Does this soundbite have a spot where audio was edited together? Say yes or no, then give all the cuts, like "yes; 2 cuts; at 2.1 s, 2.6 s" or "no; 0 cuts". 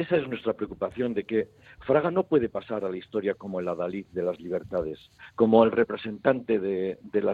no; 0 cuts